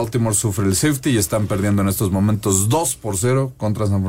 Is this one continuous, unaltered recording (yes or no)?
yes